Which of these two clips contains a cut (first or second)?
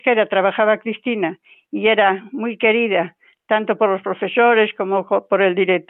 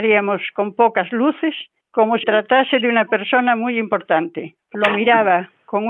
second